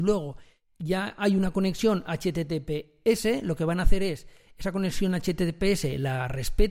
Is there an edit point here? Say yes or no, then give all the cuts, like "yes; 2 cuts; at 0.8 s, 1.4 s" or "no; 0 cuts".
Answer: no; 0 cuts